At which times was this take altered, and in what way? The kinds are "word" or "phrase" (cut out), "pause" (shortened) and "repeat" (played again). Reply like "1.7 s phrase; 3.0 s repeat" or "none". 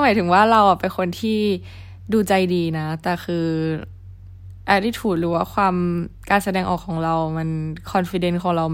none